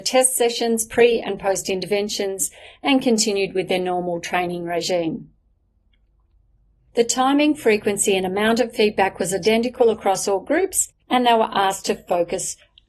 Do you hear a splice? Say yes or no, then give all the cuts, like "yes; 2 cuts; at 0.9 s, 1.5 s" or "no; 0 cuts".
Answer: yes; 1 cut; at 11.0 s